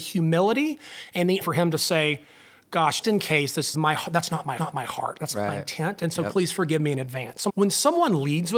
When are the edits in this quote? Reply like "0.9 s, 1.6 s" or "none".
1.4 s, 3.0 s, 3.7 s, 4.6 s, 7.5 s